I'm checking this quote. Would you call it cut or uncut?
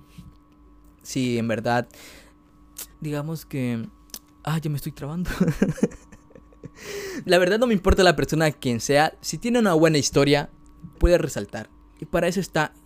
cut